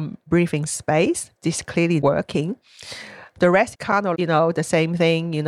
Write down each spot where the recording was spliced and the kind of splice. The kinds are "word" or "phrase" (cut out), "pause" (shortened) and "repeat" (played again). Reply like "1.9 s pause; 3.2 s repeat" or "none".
1.4 s word; 2.0 s word; 3.7 s word; 4.1 s word